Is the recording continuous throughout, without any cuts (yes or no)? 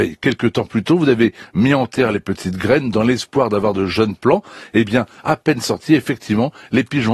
yes